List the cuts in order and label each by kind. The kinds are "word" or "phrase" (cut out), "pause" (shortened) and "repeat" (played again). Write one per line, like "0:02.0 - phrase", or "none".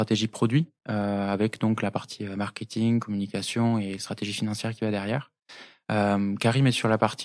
none